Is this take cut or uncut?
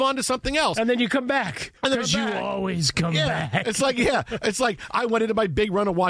cut